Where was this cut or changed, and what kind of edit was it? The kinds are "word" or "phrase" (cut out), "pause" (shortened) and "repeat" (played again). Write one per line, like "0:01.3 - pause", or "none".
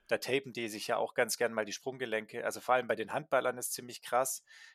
none